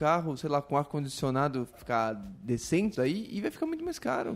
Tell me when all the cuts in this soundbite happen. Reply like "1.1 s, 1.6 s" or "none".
1.7 s, 2.9 s